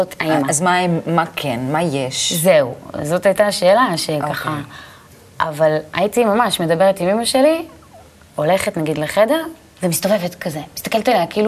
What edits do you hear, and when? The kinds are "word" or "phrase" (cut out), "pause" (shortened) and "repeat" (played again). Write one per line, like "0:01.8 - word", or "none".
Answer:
none